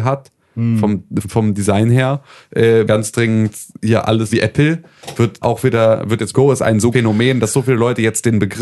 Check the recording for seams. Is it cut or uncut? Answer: cut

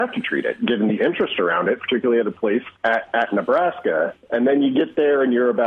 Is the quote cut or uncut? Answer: cut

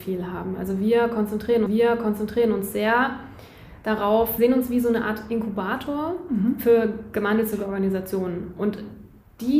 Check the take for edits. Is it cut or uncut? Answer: cut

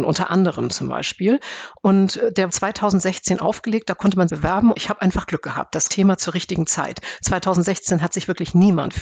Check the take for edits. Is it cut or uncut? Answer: cut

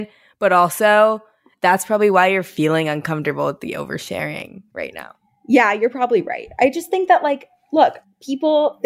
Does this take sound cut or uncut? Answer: uncut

